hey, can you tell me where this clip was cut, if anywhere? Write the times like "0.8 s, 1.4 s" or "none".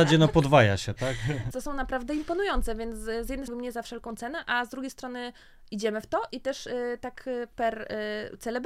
1.5 s, 3.5 s